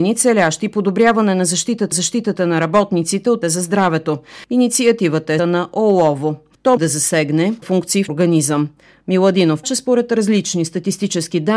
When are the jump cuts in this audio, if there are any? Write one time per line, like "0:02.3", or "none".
0:01.9
0:03.4
0:05.4
0:06.8
0:07.6
0:08.1
0:09.6